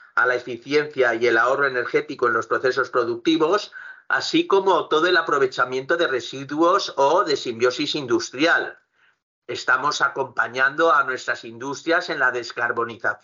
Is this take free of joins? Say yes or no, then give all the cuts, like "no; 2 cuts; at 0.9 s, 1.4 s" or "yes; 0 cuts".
yes; 0 cuts